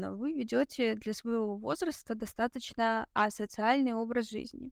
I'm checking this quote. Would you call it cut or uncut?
uncut